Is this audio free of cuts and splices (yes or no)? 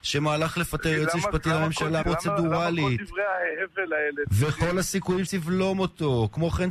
no